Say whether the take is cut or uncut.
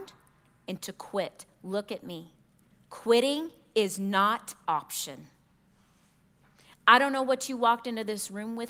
cut